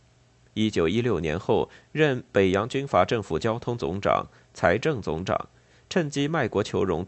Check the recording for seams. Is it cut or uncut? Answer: uncut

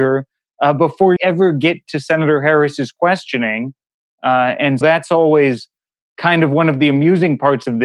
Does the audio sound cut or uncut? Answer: cut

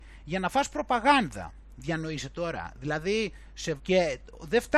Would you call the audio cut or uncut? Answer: cut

